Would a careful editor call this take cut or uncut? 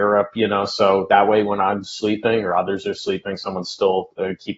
uncut